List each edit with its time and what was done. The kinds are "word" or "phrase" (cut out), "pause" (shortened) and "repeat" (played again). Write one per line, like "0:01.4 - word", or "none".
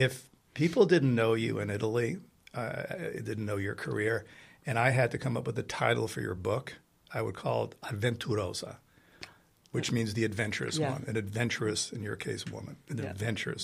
none